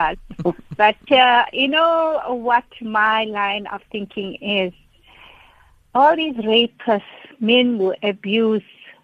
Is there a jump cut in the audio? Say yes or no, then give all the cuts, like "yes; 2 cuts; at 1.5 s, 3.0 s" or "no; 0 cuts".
no; 0 cuts